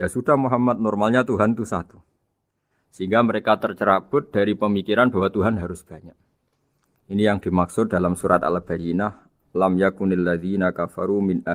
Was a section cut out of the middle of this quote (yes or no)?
no